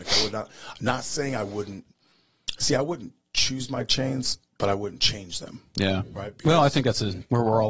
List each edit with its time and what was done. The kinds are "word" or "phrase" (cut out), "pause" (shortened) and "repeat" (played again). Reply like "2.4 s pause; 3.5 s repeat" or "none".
none